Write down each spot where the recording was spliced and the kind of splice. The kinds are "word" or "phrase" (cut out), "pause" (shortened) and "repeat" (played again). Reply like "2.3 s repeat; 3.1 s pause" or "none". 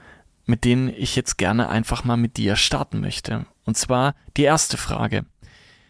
none